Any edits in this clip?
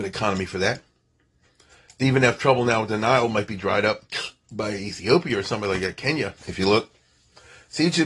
yes; 1 cut; at 6.4 s

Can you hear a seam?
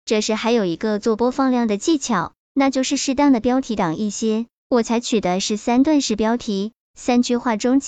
no; 0 cuts

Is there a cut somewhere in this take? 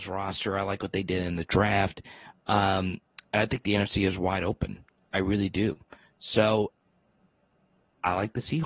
no; 0 cuts

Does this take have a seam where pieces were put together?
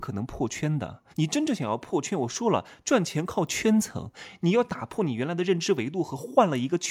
yes; 1 cut; at 1.1 s

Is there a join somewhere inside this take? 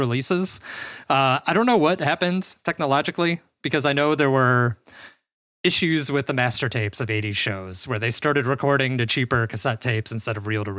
no; 0 cuts

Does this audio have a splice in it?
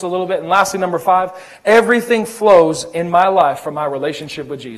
no; 0 cuts

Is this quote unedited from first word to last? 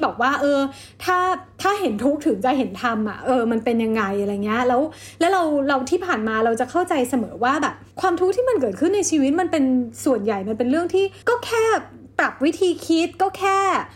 no; 2 cuts; at 7.9 s, 11.2 s

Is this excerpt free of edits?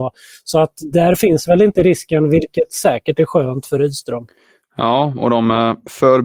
yes; 0 cuts

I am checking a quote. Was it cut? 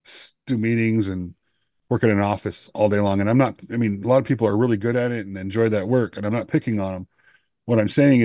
no; 0 cuts

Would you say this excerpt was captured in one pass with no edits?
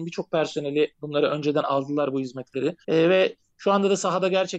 no; 1 cut; at 2.8 s

